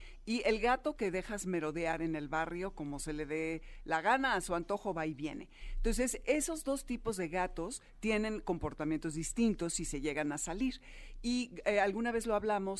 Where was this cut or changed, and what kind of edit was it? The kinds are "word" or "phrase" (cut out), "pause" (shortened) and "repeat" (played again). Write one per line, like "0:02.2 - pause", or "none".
none